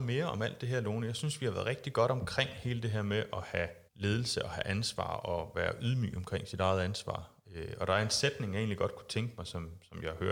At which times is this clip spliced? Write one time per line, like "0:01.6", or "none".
0:03.9